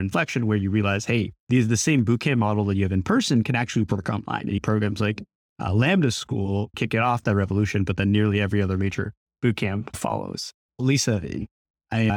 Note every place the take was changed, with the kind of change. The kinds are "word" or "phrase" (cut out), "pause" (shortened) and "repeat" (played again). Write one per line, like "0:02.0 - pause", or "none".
0:01.4 - pause
0:06.7 - word

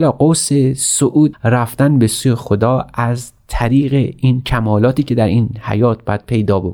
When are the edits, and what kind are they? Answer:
0:01.3 - word

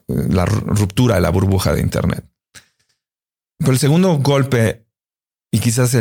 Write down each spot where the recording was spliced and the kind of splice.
none

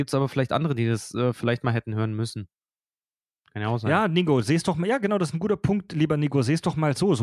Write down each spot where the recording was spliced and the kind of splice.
none

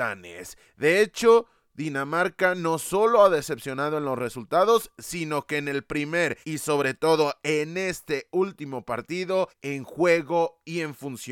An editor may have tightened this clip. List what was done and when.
0:06.4 - pause
0:09.5 - pause

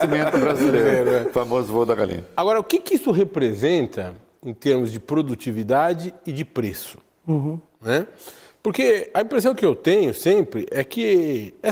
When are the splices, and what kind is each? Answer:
none

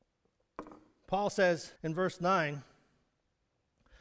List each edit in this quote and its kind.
0:01.8 - pause

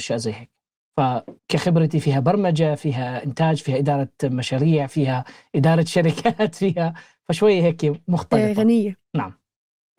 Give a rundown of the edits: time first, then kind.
0:01.4 - pause

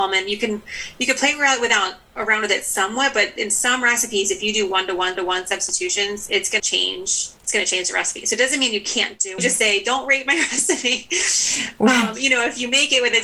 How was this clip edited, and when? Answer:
0:05.2 - repeat
0:06.6 - word
0:07.4 - pause
0:09.4 - phrase

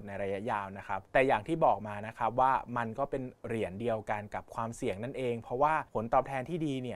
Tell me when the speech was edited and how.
0:01.1 - pause
0:03.4 - pause
0:05.9 - pause

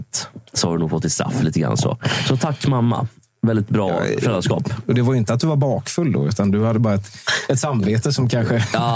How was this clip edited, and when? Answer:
none

